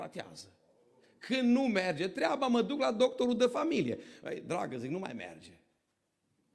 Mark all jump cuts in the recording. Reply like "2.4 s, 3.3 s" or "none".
none